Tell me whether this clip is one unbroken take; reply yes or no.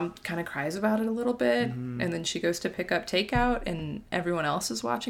yes